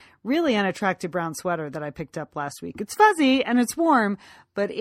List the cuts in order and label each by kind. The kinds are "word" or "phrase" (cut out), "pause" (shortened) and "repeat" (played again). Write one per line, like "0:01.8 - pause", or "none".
none